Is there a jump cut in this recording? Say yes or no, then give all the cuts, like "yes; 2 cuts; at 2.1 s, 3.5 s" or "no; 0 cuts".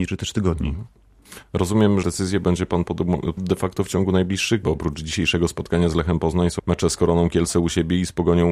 yes; 4 cuts; at 2.0 s, 3.4 s, 4.6 s, 6.6 s